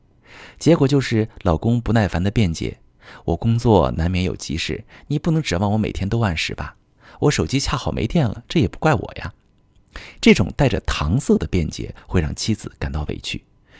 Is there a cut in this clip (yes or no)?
no